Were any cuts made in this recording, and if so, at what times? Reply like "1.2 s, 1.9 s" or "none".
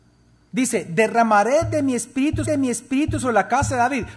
2.4 s